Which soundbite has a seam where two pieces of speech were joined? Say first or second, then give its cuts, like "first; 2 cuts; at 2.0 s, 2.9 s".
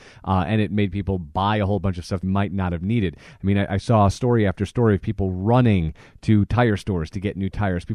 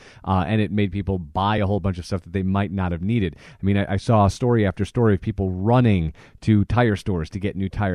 first; 1 cut; at 2.2 s